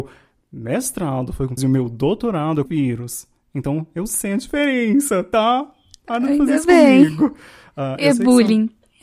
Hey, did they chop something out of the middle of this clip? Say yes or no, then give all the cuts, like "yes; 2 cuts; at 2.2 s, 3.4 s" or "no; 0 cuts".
yes; 2 cuts; at 1.6 s, 2.7 s